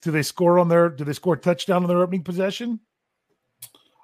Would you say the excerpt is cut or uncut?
uncut